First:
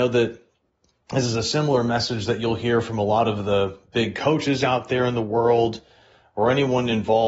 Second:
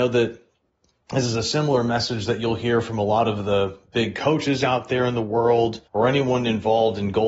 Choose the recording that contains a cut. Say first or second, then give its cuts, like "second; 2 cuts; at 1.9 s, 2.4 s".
second; 1 cut; at 5.9 s